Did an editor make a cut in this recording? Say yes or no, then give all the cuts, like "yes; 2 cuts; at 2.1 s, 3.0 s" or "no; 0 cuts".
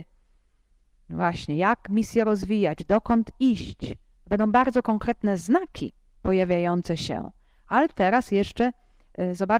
no; 0 cuts